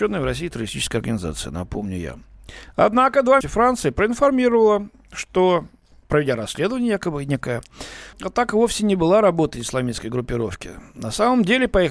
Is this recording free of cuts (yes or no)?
no